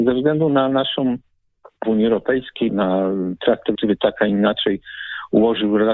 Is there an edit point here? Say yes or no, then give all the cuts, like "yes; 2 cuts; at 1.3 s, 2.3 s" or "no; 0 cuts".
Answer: yes; 3 cuts; at 1.8 s, 2.7 s, 3.7 s